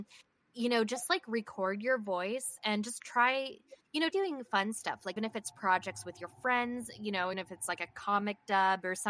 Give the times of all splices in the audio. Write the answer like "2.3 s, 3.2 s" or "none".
4.1 s, 5.2 s, 7.3 s